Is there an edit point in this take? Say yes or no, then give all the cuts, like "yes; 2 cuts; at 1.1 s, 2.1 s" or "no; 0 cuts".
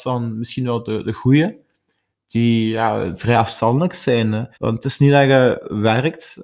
yes; 1 cut; at 4.5 s